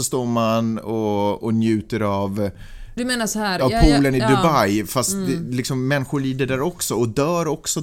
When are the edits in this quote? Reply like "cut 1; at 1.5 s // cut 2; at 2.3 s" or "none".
cut 1; at 3.0 s